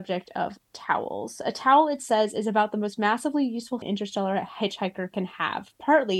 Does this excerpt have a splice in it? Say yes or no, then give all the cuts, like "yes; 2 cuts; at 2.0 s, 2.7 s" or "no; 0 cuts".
yes; 1 cut; at 3.8 s